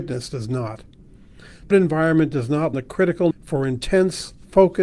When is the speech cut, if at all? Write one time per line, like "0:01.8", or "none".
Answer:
0:01.7
0:02.7
0:03.3